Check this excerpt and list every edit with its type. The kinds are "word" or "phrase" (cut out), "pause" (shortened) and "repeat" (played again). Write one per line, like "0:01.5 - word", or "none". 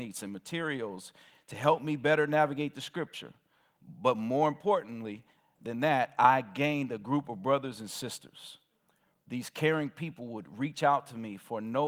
none